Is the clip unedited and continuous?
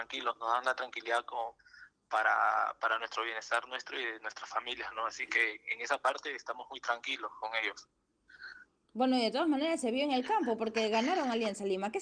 yes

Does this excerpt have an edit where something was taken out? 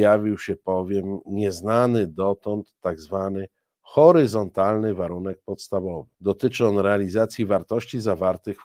yes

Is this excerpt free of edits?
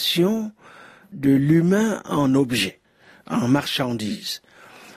yes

